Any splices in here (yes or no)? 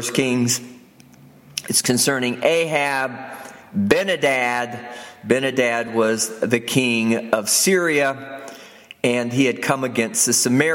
no